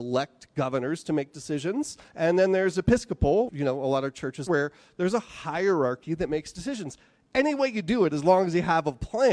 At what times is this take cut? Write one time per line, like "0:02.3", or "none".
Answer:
0:02.1
0:03.5
0:04.5

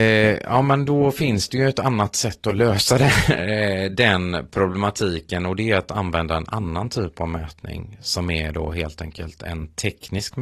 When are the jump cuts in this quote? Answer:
none

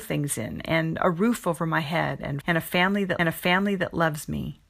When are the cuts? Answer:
0:02.4
0:03.2

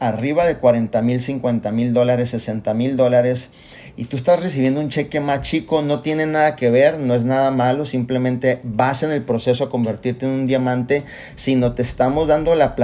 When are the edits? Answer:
none

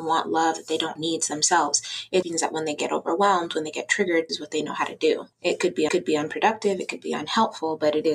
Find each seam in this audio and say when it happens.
0:01.0
0:02.2
0:04.3
0:05.3
0:05.9

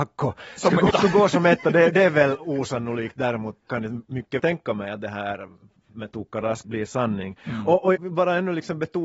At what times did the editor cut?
0:00.9
0:03.6
0:04.4
0:05.9
0:06.6
0:08.0

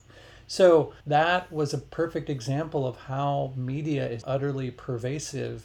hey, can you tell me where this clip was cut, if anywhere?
0:01.0
0:04.2

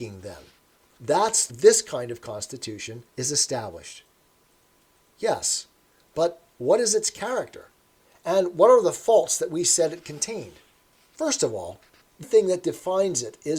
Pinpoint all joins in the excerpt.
0:01.5
0:03.1
0:10.9
0:12.2

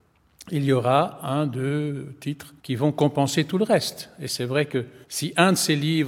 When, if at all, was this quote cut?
0:02.6
0:05.0

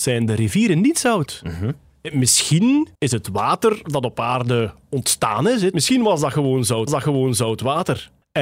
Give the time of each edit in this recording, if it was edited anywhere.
0:02.9
0:06.9

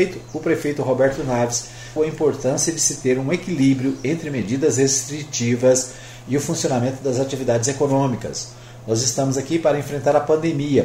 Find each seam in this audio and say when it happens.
0:02.0

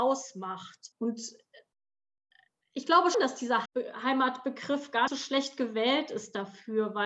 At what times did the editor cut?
0:00.9
0:03.1
0:03.7
0:05.1

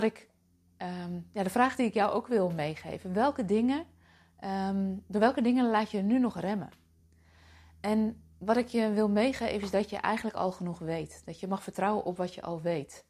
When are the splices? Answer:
none

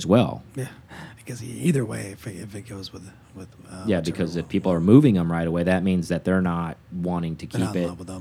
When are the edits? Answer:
0:06.8

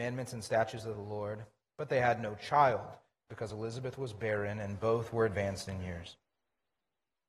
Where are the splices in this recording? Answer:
none

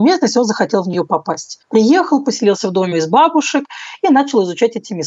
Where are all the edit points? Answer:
0:02.9

